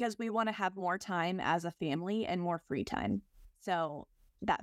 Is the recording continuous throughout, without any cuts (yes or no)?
yes